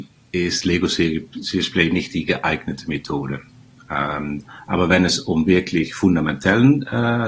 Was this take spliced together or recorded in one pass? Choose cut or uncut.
uncut